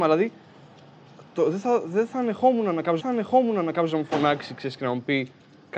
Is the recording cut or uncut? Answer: cut